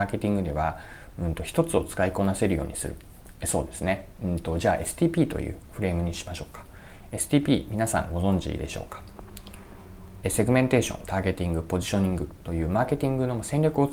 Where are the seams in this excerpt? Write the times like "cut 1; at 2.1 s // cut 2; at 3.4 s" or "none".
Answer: none